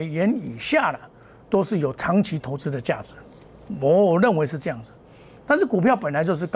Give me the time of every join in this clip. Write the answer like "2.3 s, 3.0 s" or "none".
none